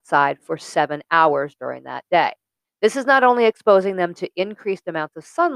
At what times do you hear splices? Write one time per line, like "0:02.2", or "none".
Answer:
0:02.6